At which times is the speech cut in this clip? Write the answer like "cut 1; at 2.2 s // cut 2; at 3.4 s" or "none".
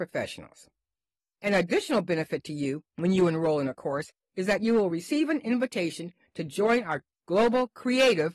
cut 1; at 2.9 s